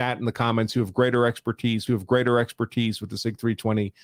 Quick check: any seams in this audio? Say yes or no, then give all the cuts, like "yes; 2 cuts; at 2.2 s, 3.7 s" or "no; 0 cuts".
yes; 1 cut; at 1.9 s